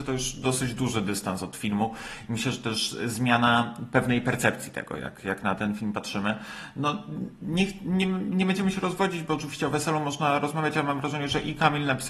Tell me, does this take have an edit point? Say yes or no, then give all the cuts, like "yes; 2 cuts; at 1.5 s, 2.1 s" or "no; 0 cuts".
no; 0 cuts